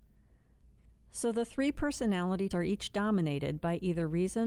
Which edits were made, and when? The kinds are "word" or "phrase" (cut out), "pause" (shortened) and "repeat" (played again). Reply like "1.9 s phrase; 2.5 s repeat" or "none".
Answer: 2.5 s word